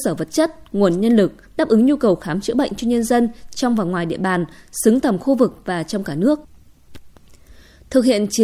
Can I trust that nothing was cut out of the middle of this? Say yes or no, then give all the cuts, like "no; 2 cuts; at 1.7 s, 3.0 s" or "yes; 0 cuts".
yes; 0 cuts